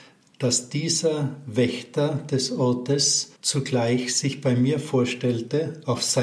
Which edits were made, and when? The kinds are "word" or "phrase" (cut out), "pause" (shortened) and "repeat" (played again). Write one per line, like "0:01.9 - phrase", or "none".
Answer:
0:03.4 - pause